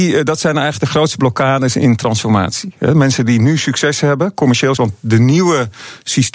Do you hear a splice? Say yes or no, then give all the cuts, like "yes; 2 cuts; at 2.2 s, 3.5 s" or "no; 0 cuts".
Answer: yes; 1 cut; at 4.8 s